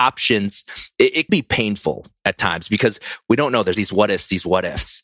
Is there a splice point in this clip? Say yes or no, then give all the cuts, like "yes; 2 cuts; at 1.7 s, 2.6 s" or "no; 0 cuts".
yes; 2 cuts; at 1.3 s, 3.7 s